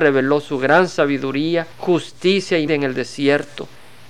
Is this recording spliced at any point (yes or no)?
yes